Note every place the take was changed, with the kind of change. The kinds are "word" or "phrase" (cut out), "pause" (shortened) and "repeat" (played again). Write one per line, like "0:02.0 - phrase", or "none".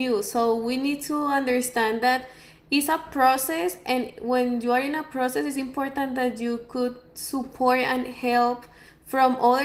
none